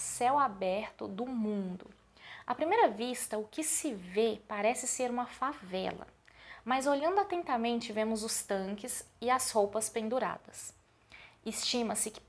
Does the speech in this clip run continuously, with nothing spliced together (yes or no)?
yes